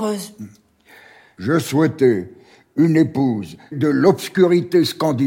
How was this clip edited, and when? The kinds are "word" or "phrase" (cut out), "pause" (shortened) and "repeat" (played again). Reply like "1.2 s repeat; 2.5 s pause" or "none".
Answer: 3.7 s word